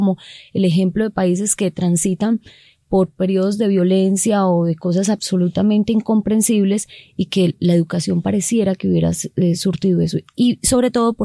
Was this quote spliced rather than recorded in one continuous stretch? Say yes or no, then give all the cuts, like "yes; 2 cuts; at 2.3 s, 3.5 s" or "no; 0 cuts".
no; 0 cuts